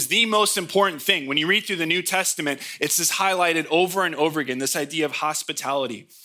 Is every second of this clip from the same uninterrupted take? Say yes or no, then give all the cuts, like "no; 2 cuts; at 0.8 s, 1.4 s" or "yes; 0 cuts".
yes; 0 cuts